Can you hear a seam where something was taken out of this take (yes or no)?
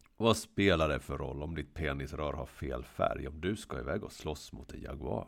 no